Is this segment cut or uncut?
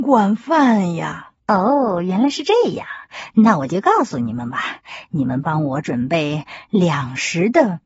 cut